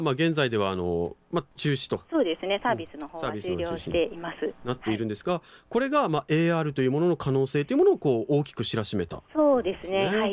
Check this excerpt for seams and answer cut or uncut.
uncut